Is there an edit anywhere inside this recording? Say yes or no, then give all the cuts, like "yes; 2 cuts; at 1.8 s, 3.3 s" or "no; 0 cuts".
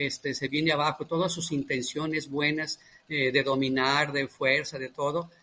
no; 0 cuts